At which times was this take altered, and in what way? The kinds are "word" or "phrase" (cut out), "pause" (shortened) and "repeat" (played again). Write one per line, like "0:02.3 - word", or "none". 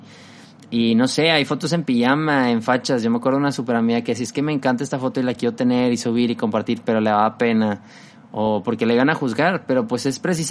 none